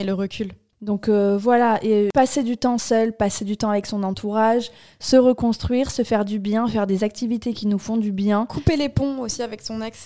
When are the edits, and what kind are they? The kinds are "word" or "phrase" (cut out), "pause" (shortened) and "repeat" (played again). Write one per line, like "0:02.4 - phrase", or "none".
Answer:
none